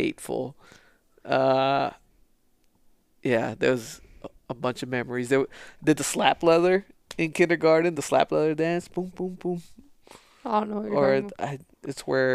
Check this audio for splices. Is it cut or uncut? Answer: uncut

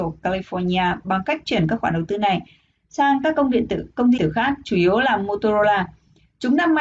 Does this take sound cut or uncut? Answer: cut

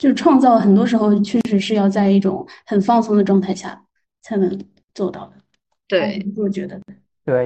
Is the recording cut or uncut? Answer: uncut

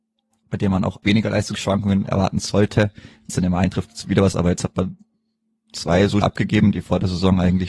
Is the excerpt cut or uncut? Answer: cut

